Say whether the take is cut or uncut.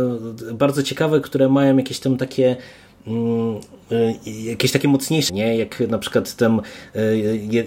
cut